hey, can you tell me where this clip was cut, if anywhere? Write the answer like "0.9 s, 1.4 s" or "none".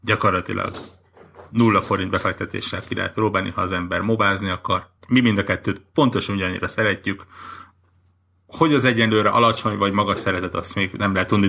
5.0 s